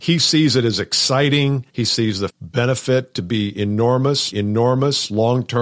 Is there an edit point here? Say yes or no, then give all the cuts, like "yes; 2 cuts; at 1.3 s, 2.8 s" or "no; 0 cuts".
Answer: yes; 3 cuts; at 1.7 s, 2.3 s, 4.3 s